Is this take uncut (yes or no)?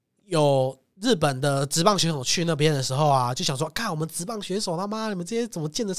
yes